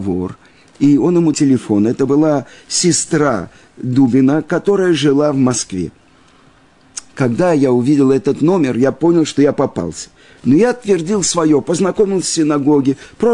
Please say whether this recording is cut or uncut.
cut